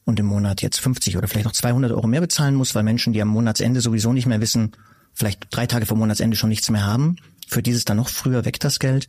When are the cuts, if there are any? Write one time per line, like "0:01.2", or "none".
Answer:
none